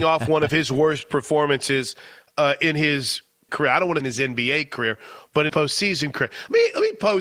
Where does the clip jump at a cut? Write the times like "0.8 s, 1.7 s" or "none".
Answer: 3.5 s, 4.0 s, 5.5 s

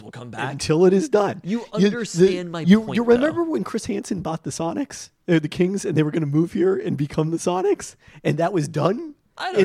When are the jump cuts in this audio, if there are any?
none

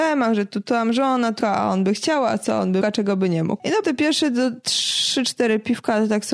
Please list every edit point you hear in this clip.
1.4 s, 2.8 s, 3.8 s

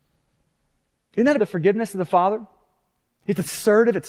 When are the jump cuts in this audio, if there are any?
1.4 s

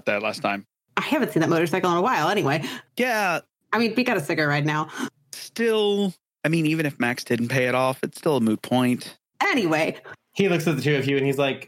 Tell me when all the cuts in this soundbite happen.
2.9 s

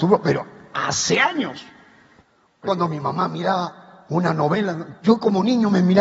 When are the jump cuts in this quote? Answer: 2.7 s, 5.0 s

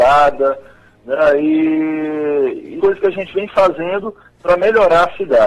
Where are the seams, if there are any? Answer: 2.8 s

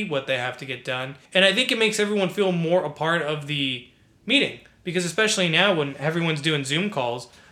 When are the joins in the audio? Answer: 1.3 s

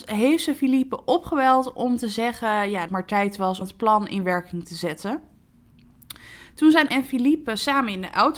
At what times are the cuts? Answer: 2.9 s, 3.6 s, 6.9 s

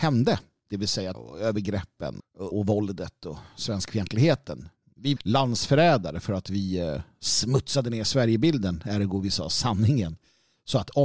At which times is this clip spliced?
1.1 s, 2.2 s, 2.5 s, 5.2 s

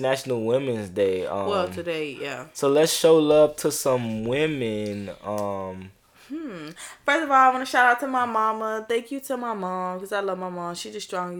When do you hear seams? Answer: 6.1 s

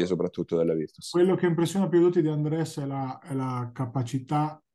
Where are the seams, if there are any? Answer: none

